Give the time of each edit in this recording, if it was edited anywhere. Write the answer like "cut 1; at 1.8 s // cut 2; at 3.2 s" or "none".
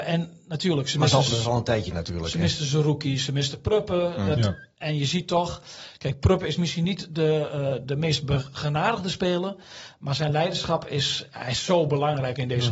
cut 1; at 7.8 s